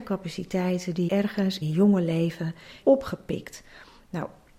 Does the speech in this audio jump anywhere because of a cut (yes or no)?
yes